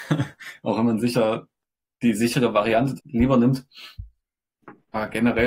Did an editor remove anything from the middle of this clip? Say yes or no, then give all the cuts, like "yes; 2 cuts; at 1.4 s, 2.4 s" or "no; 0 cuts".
yes; 1 cut; at 3.0 s